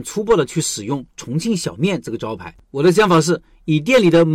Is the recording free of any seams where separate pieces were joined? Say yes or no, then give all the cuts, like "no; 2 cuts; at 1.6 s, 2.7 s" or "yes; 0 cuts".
no; 1 cut; at 2.6 s